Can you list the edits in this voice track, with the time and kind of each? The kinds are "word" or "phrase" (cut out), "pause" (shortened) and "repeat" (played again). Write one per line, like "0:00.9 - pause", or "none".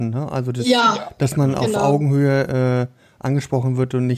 none